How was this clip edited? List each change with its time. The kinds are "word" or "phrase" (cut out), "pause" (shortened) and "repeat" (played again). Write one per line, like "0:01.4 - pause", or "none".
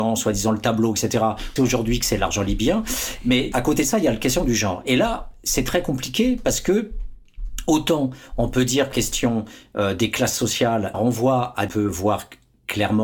0:01.6 - word
0:03.5 - word
0:08.9 - word
0:10.9 - word
0:11.7 - phrase